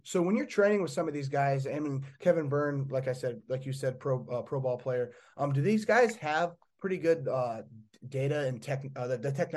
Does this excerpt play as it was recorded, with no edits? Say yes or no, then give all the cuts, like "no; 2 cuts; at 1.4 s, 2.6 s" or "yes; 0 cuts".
yes; 0 cuts